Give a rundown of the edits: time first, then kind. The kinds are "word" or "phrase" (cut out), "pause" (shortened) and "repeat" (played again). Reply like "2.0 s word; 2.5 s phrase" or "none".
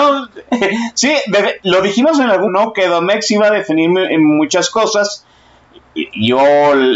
2.5 s word

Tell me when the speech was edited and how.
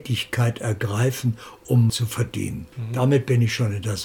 1.9 s phrase; 2.7 s pause

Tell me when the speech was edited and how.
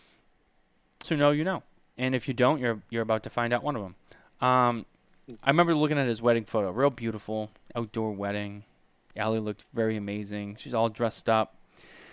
1.0 s phrase

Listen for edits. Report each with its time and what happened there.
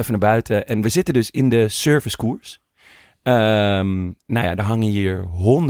4.2 s word

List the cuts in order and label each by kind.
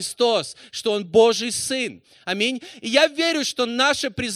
none

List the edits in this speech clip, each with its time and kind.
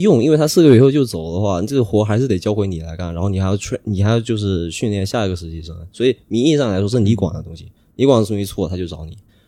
none

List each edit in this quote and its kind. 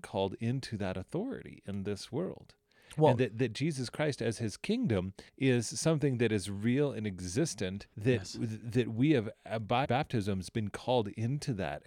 3.2 s phrase; 5.3 s pause; 7.9 s pause; 9.8 s word

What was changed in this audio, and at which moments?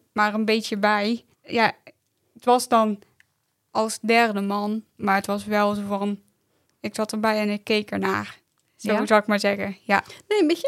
1.3 s pause

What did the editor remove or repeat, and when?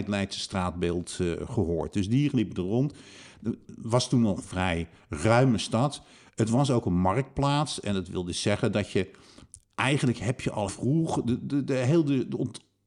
10.7 s word

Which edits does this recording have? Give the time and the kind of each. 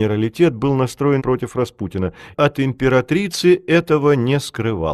1.2 s word; 2.3 s word

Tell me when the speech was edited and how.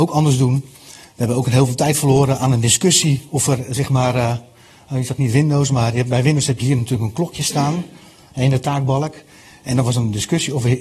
none

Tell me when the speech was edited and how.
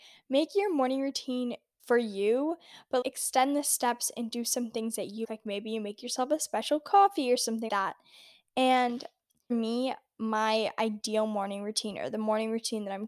1.8 s word; 3.0 s word; 5.2 s word; 7.7 s word; 9.5 s word

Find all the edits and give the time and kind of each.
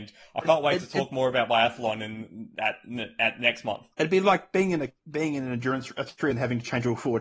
3.9 s pause; 5.0 s pause; 6.3 s phrase

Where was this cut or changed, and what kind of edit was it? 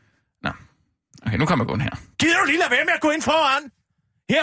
2.1 s pause

